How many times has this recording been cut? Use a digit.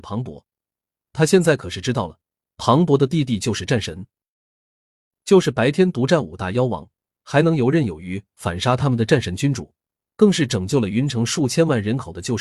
0